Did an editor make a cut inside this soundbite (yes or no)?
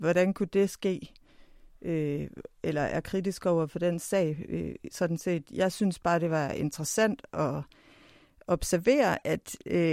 no